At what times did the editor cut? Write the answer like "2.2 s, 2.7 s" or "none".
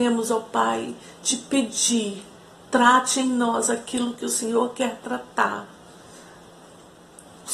none